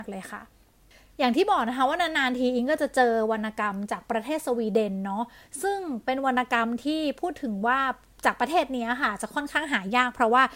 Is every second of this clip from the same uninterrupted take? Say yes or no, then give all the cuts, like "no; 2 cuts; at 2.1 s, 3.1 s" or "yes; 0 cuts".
yes; 0 cuts